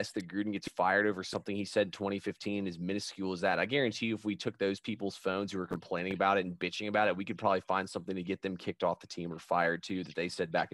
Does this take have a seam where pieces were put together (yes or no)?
no